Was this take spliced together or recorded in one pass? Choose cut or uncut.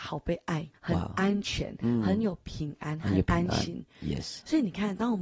uncut